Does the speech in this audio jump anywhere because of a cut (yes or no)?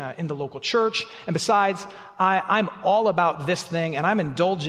no